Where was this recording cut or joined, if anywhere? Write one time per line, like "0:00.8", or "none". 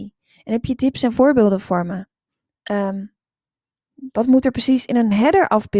none